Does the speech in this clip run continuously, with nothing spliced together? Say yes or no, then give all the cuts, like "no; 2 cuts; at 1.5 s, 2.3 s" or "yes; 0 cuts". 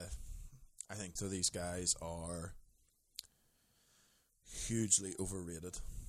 no; 1 cut; at 1.2 s